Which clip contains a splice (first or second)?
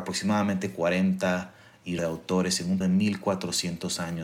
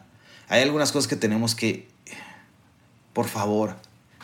first